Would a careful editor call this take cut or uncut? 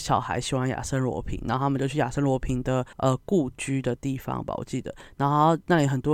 cut